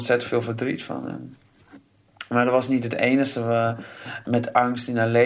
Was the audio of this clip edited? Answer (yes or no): no